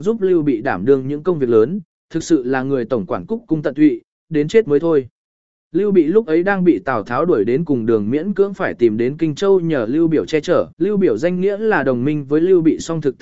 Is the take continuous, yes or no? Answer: no